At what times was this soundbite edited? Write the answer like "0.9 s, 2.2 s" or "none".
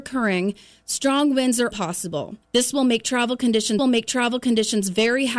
1.7 s, 2.4 s, 3.8 s